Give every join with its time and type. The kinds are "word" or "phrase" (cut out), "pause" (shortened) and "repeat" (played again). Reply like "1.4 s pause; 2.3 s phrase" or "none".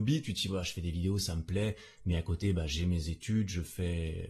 none